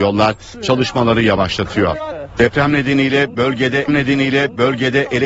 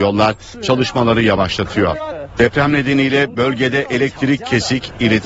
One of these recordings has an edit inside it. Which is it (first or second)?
first